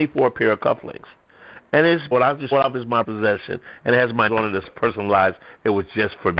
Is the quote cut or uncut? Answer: cut